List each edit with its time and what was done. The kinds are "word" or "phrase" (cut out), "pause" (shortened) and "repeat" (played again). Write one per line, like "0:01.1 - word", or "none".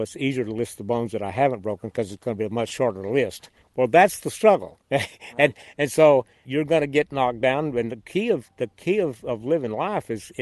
0:03.6 - pause
0:06.4 - word